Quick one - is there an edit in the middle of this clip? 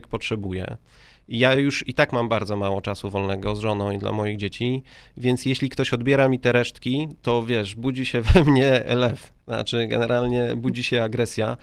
no; 0 cuts

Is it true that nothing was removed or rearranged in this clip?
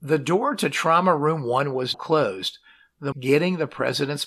no; 2 cuts; at 1.9 s, 3.1 s

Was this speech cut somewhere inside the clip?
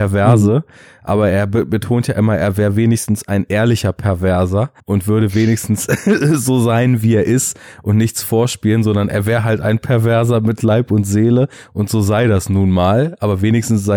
yes; 1 cut; at 4.8 s

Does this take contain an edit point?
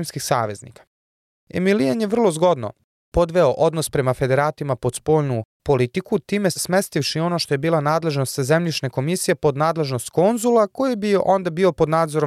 no; 0 cuts

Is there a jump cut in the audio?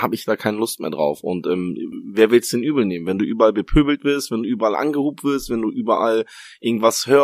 no; 0 cuts

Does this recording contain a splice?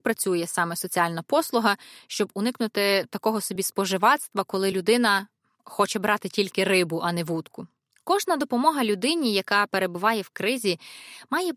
no; 0 cuts

